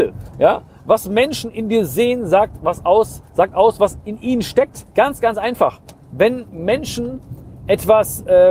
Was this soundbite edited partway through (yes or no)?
yes